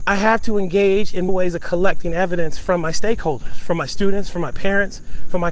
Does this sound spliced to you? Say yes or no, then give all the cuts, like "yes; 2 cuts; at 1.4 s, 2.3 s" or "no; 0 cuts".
yes; 1 cut; at 1.3 s